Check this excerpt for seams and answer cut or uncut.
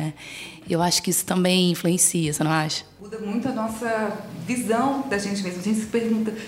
uncut